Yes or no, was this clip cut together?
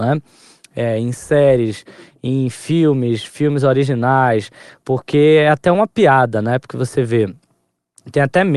no